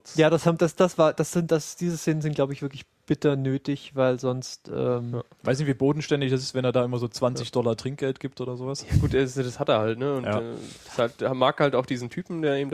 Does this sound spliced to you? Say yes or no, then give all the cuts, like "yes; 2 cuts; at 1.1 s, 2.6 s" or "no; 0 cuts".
no; 0 cuts